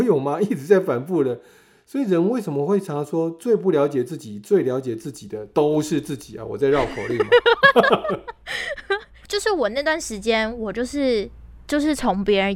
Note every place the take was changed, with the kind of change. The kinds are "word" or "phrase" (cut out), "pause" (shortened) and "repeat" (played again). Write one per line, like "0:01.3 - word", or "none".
none